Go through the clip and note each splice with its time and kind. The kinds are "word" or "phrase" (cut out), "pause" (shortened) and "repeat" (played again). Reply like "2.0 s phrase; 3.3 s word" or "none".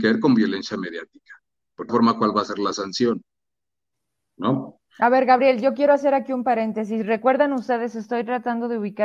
1.9 s phrase; 4.9 s pause